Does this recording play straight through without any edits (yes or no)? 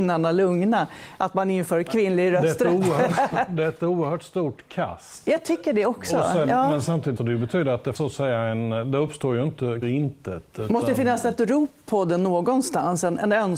no